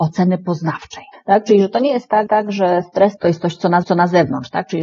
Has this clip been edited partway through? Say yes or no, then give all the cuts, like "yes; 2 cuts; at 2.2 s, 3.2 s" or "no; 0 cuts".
yes; 3 cuts; at 1.1 s, 2.3 s, 3.8 s